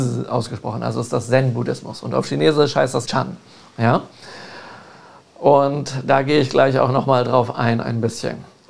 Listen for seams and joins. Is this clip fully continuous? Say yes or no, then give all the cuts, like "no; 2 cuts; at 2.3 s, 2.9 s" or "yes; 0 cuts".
no; 1 cut; at 3.0 s